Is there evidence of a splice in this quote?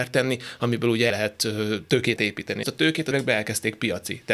yes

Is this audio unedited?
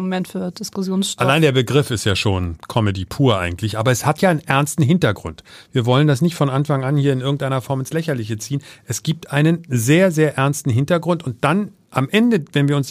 yes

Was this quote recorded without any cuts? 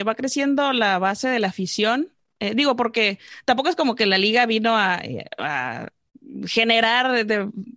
yes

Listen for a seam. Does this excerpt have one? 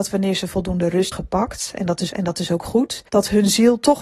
yes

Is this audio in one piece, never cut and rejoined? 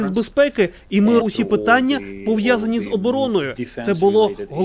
no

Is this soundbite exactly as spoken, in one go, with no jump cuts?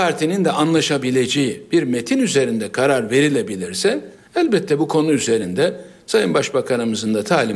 yes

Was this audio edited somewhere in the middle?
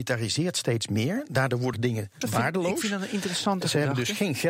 yes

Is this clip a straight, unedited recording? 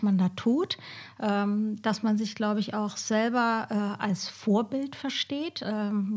yes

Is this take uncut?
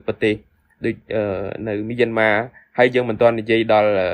yes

